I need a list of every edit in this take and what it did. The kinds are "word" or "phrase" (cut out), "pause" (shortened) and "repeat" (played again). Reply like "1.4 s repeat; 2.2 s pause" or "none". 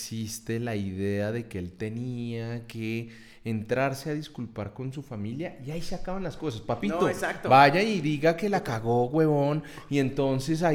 none